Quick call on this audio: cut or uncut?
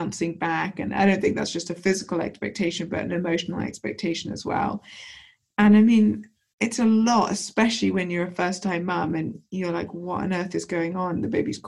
uncut